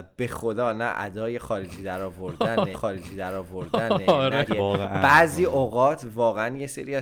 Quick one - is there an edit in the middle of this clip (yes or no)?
yes